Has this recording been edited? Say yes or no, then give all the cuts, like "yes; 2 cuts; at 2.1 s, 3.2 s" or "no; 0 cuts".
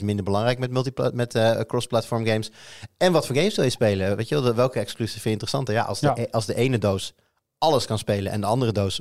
no; 0 cuts